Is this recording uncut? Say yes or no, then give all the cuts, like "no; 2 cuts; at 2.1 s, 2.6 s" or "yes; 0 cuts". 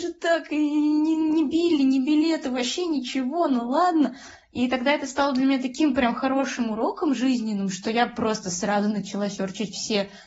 yes; 0 cuts